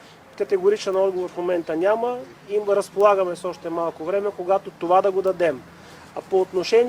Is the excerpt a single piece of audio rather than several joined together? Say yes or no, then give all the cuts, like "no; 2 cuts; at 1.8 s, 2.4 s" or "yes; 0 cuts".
yes; 0 cuts